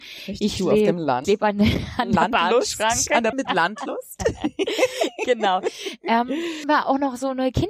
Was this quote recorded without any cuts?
no; 3 cuts; at 1.2 s, 3.3 s, 6.6 s

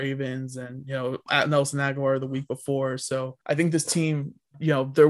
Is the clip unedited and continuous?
no; 1 cut; at 3.4 s

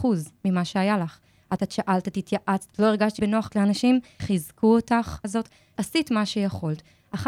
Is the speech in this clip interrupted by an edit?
yes; 7 cuts; at 1.6 s, 2.7 s, 3.2 s, 3.5 s, 4.2 s, 5.2 s, 5.8 s

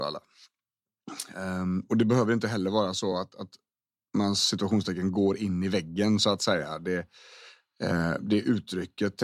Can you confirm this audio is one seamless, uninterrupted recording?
yes; 0 cuts

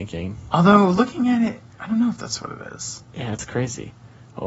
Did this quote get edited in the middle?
yes; 1 cut; at 1.7 s

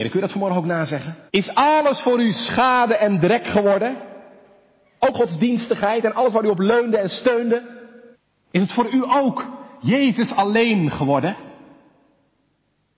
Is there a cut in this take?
yes; 3 cuts; at 1.3 s, 5.1 s, 8.1 s

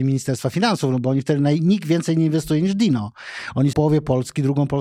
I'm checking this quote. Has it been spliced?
yes; 1 cut; at 3.7 s

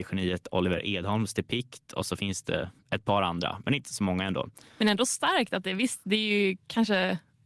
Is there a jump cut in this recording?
no; 0 cuts

